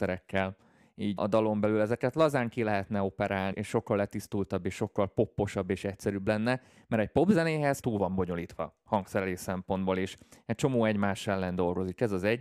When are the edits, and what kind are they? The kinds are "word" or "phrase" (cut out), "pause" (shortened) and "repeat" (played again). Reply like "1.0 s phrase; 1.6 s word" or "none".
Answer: 1.2 s word; 3.5 s word; 7.8 s word